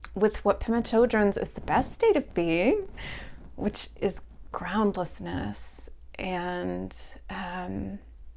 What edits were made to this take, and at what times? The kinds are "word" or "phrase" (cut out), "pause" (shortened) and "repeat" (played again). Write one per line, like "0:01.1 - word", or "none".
0:01.3 - word